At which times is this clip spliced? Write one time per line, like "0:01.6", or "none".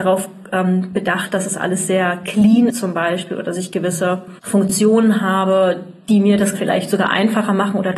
0:02.7
0:04.4
0:06.5